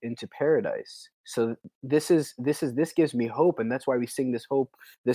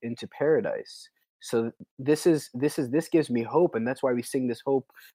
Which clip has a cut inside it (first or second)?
first